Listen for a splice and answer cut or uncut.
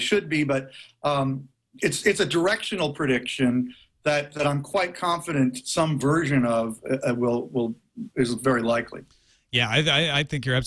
uncut